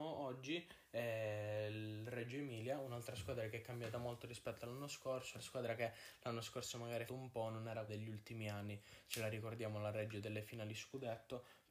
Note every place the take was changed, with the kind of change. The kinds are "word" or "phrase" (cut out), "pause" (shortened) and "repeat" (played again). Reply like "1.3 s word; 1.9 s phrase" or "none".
5.3 s word; 7.1 s word; 7.9 s word